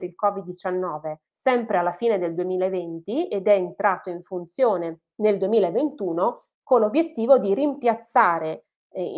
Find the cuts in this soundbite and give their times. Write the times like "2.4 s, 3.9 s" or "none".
none